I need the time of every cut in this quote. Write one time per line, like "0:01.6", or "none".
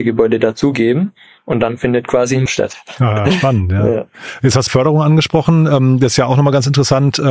0:02.5
0:04.7